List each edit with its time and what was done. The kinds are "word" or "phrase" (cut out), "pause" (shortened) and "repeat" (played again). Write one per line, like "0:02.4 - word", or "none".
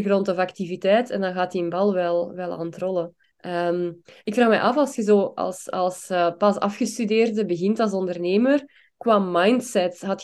0:03.2 - pause